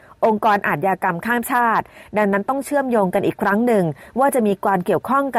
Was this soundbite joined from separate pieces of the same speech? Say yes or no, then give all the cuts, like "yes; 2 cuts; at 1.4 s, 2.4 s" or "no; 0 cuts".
no; 0 cuts